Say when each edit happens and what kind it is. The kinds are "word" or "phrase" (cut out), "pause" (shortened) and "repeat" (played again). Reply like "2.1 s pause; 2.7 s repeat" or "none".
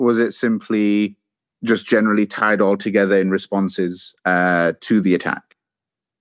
1.3 s pause